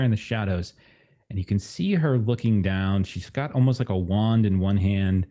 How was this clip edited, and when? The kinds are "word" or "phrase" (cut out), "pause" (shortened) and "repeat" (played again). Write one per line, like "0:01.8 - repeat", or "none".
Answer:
none